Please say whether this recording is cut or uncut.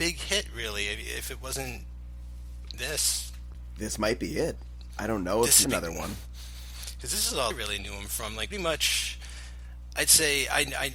cut